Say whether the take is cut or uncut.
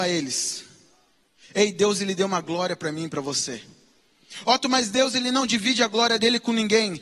uncut